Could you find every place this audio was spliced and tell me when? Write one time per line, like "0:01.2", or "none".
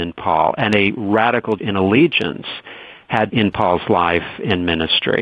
0:01.6
0:03.3